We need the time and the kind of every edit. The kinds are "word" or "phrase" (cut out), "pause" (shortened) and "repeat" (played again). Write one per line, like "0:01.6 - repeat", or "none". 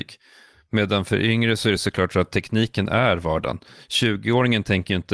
none

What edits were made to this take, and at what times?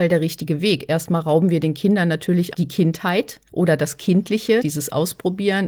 0:02.5 - word
0:03.5 - pause
0:04.6 - word

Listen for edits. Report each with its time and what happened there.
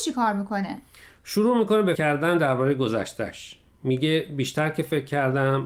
0:02.0 - word

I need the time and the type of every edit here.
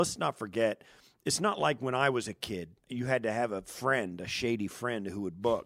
0:02.8 - pause

